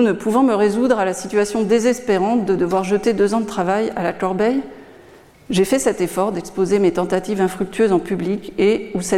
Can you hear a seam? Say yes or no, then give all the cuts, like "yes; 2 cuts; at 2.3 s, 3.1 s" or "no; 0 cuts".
no; 0 cuts